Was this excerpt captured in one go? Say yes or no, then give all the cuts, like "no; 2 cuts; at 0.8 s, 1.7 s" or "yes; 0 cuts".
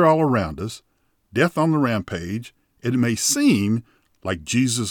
yes; 0 cuts